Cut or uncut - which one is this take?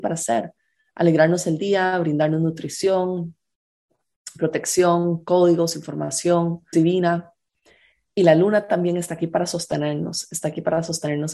cut